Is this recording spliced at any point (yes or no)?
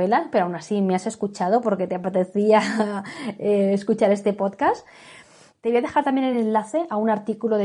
no